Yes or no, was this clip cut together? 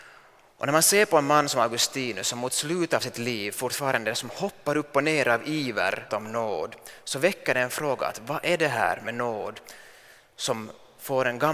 yes